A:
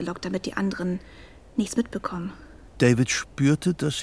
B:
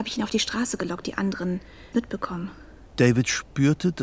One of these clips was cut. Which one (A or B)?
B